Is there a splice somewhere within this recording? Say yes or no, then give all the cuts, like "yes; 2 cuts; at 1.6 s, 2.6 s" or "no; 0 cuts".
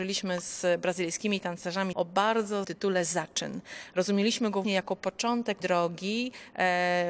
yes; 4 cuts; at 1.9 s, 2.6 s, 4.6 s, 5.6 s